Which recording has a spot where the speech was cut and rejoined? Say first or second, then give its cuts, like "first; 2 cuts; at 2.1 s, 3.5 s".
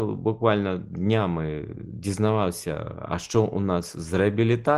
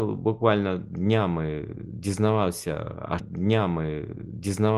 second; 1 cut; at 3.2 s